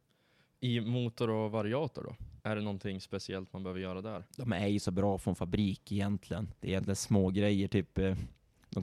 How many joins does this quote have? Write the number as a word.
three